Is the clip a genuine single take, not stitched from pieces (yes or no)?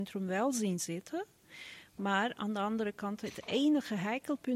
yes